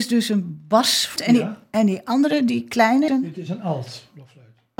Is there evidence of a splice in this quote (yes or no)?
yes